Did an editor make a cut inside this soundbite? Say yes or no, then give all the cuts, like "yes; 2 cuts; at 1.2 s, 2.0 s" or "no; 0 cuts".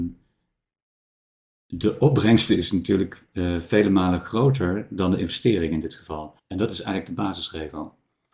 yes; 1 cut; at 6.4 s